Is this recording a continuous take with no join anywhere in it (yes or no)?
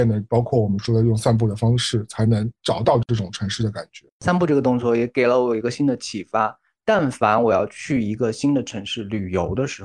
no